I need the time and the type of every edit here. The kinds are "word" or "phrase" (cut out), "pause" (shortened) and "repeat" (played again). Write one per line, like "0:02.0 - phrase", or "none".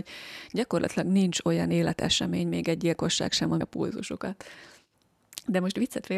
0:03.6 - word

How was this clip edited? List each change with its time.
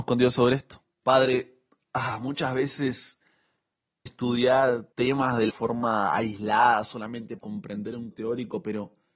0:00.9 - pause
0:04.1 - word
0:04.9 - pause
0:05.5 - phrase
0:07.4 - word
0:08.1 - word

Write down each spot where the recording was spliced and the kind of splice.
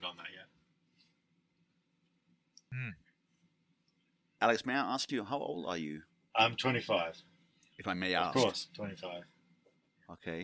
none

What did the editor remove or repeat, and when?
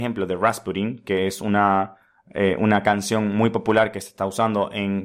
none

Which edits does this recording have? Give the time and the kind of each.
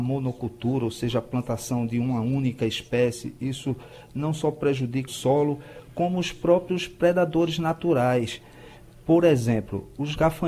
0:05.1 - word

